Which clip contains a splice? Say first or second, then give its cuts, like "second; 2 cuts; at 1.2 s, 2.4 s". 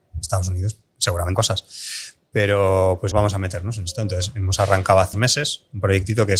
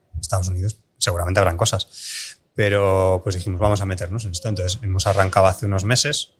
first; 3 cuts; at 1.3 s, 3.1 s, 5.1 s